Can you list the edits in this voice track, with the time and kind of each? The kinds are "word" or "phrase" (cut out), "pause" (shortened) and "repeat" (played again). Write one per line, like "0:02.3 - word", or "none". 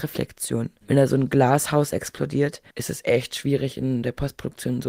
0:02.7 - pause